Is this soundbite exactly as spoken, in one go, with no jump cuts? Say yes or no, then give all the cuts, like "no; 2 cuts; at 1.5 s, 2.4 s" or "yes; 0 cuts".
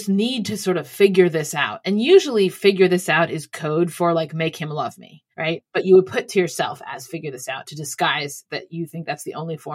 no; 1 cut; at 5.3 s